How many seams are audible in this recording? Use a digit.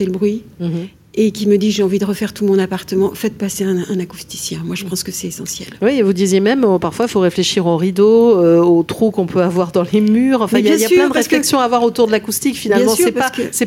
0